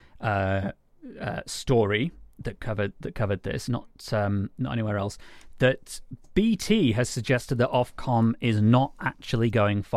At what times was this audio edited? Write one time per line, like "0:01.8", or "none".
none